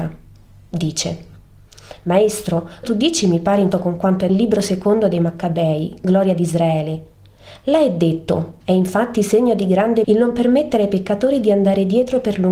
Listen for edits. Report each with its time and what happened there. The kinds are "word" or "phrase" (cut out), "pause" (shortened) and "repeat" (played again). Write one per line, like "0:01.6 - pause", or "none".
0:02.8 - word
0:03.7 - word
0:04.3 - phrase
0:08.6 - pause
0:10.0 - word